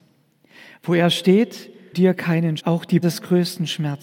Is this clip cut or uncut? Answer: cut